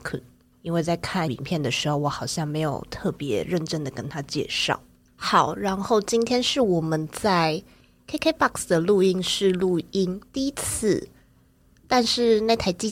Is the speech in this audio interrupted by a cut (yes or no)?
yes